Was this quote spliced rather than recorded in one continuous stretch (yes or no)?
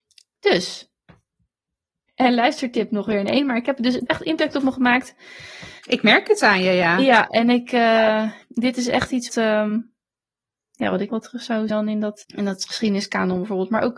yes